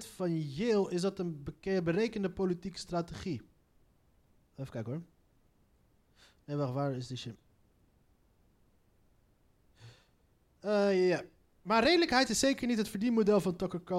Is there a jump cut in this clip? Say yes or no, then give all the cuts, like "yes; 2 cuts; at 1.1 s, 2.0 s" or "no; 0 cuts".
no; 0 cuts